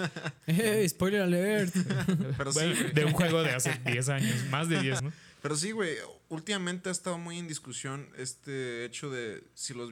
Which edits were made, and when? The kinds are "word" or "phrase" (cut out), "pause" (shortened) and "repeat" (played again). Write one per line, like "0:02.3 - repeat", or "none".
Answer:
0:05.0 - word